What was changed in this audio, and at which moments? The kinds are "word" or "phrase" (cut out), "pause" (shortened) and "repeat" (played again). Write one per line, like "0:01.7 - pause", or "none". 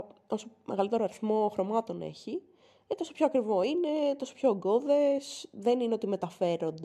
none